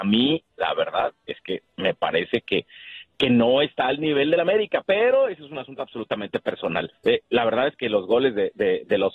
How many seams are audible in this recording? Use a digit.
1